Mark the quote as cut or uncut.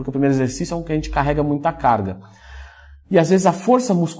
uncut